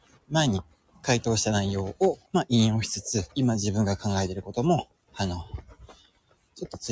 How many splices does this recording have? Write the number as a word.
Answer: two